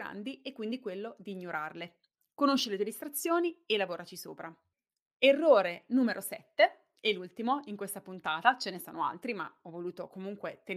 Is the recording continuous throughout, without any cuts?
yes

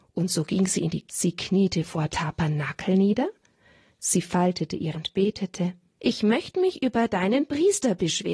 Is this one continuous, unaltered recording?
no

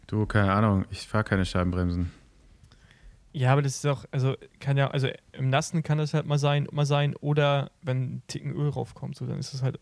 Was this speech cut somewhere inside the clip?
yes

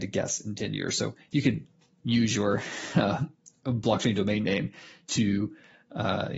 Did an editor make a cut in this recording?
no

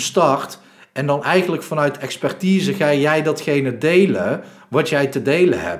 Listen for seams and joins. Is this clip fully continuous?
yes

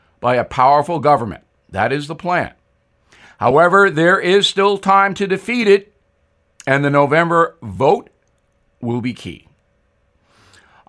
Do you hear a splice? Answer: no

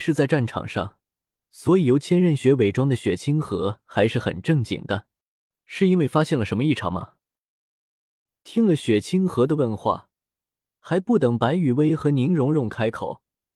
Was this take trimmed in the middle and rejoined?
no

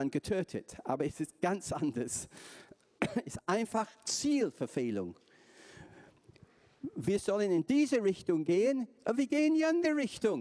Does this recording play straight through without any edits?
yes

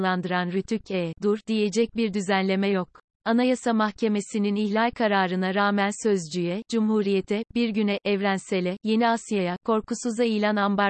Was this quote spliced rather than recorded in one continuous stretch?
yes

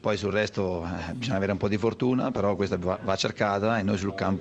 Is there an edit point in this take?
no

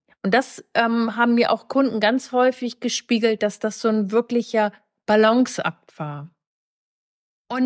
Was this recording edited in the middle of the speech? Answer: no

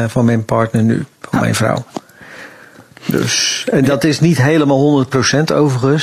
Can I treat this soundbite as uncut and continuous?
yes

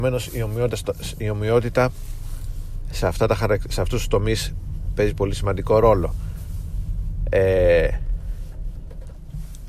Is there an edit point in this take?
no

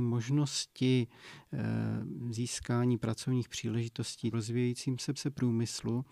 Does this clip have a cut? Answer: yes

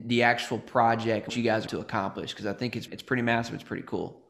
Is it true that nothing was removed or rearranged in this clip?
no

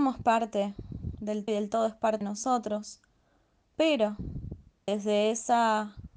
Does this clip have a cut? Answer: yes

